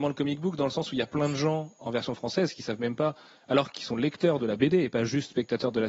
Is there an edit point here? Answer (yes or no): no